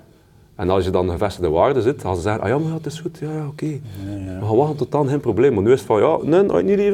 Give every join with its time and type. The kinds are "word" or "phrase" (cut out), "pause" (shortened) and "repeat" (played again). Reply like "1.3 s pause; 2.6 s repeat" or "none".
none